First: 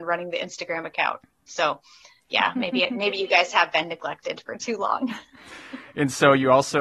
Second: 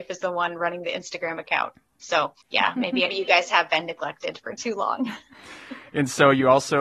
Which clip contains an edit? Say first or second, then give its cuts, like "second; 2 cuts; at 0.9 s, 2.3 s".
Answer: second; 2 cuts; at 2.4 s, 3.1 s